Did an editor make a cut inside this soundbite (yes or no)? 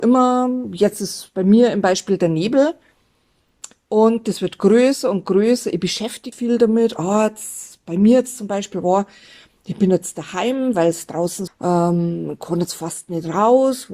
yes